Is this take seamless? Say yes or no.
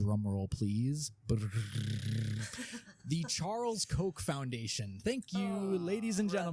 yes